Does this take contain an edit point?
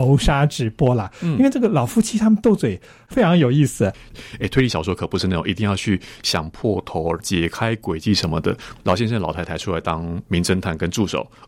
no; 0 cuts

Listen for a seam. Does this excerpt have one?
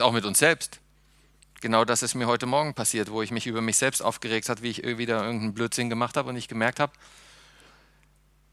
no; 0 cuts

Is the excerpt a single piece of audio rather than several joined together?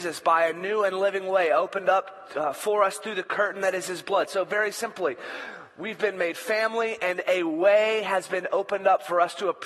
yes; 0 cuts

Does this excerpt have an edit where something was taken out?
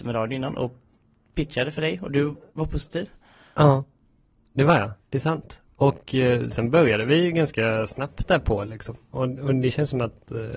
no; 0 cuts

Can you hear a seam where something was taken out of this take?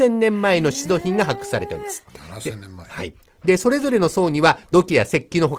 no; 0 cuts

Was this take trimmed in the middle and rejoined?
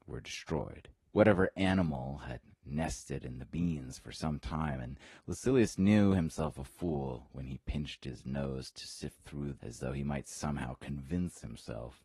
yes; 2 cuts; at 1.0 s, 9.6 s

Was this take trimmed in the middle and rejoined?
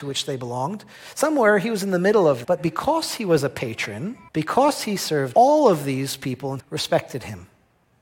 yes; 4 cuts; at 2.4 s, 4.3 s, 5.3 s, 6.6 s

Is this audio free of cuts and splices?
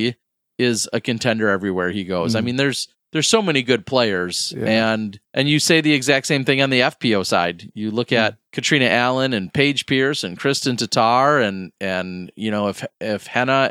no; 2 cuts; at 5.2 s, 8.5 s

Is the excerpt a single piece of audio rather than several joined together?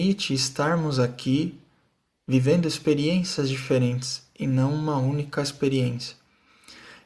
yes; 0 cuts

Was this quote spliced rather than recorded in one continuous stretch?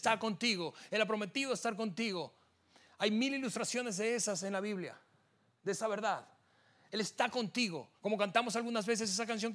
yes; 1 cut; at 8.0 s

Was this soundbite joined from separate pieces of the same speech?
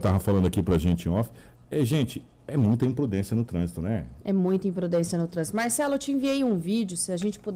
no; 0 cuts

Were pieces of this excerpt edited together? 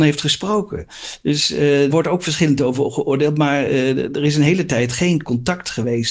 yes; 1 cut; at 1.9 s

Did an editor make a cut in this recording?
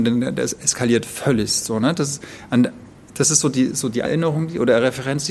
yes; 1 cut; at 4.0 s

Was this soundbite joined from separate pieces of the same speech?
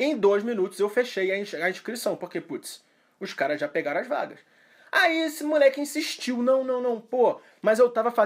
no; 0 cuts

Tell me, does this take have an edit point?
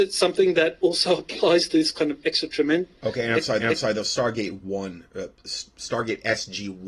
yes; 1 cut; at 3.6 s

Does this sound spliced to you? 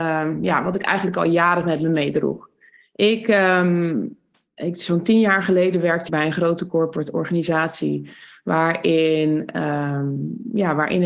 yes; 1 cut; at 6.1 s

